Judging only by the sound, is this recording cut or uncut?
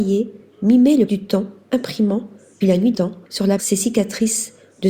cut